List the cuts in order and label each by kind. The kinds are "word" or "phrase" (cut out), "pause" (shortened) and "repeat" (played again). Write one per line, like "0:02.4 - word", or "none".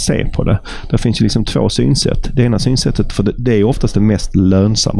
none